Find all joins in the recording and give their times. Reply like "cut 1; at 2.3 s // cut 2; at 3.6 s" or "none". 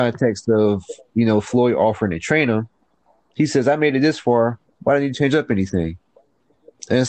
none